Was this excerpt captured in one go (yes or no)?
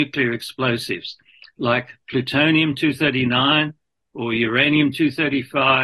yes